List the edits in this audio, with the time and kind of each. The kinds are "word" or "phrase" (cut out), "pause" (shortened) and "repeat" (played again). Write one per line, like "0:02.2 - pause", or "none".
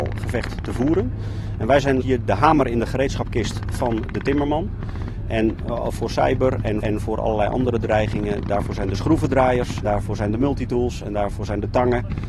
0:02.0 - word
0:06.8 - repeat
0:09.8 - word